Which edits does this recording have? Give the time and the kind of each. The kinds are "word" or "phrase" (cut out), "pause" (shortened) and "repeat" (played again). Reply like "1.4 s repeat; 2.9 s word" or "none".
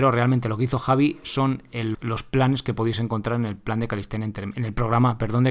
1.9 s word